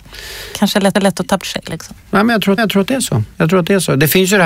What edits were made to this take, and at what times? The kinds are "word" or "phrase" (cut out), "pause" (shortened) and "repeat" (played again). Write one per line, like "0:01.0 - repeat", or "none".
0:00.9 - repeat
0:01.4 - word
0:02.0 - pause
0:02.6 - repeat